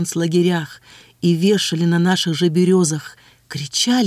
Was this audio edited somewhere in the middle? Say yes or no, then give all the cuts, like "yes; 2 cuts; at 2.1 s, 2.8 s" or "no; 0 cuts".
no; 0 cuts